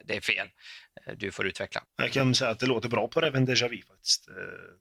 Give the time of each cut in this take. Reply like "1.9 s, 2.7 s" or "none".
1.8 s